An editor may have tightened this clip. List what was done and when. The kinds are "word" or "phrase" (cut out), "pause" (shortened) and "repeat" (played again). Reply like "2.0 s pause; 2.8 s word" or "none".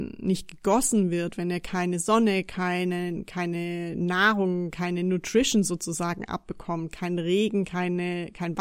none